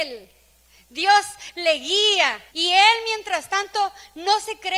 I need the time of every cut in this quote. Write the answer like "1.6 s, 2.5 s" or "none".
2.5 s